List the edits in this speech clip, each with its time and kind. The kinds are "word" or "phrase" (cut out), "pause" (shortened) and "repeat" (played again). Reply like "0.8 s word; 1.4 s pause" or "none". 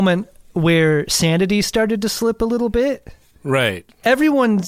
none

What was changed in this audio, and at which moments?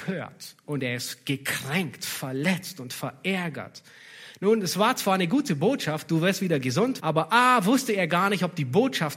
7.0 s word

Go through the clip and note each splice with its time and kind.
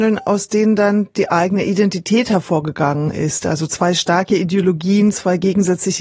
none

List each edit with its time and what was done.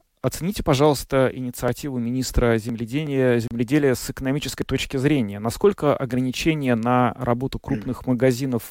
none

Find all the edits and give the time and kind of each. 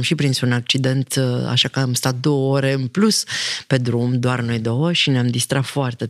none

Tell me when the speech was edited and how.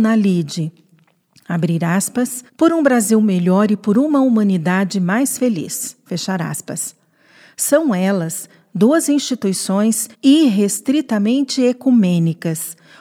2.5 s pause; 10.1 s pause

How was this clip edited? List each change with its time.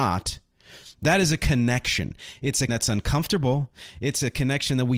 2.7 s word

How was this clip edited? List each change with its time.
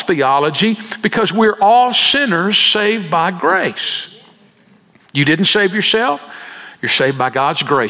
none

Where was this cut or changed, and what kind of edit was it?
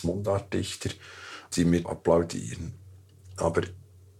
1.5 s word; 1.8 s word

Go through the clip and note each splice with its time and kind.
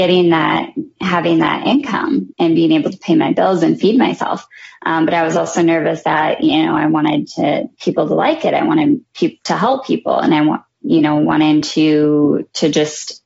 none

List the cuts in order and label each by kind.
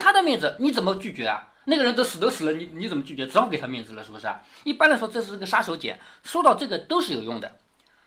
none

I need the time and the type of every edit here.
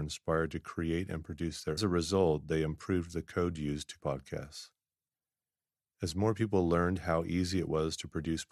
1.8 s phrase; 4.0 s word

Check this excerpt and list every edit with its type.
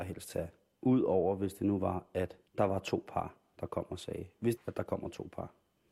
2.5 s pause; 4.6 s phrase

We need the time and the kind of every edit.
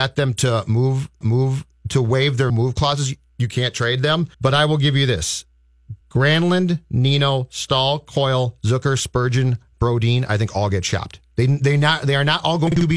1.2 s repeat; 2.5 s word; 4.3 s pause; 6.0 s pause

